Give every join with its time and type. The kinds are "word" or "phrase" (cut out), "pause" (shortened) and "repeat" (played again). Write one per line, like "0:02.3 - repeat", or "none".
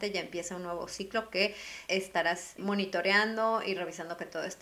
0:01.9 - word
0:02.6 - word